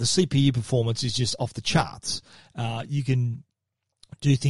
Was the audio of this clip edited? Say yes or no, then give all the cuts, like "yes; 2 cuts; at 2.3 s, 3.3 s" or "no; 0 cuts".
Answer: no; 0 cuts